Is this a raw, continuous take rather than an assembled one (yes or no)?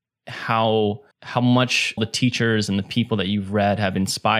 no